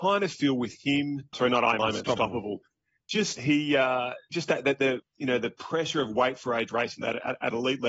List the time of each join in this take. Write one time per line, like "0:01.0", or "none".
0:01.3
0:01.8
0:03.4
0:04.3

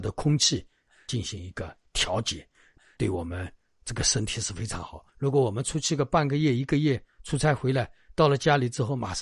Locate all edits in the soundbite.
0:05.1

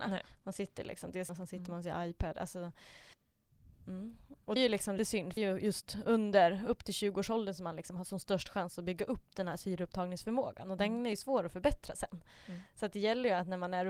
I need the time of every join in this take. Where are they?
0:01.3
0:04.6
0:05.0
0:05.4

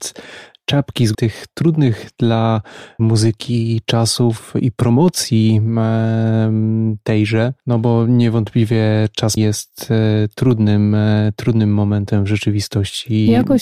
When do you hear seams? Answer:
0:01.1
0:03.0
0:09.4

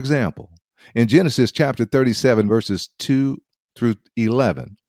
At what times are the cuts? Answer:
none

